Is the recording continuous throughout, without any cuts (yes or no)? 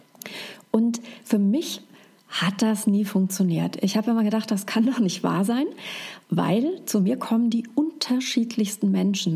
yes